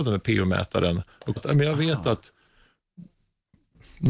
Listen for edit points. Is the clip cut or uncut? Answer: cut